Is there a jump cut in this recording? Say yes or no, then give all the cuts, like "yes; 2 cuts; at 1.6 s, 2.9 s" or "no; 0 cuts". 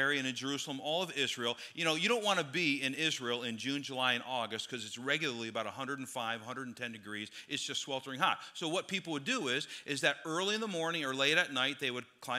no; 0 cuts